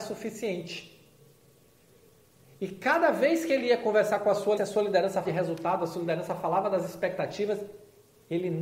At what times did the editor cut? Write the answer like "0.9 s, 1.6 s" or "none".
4.6 s, 5.2 s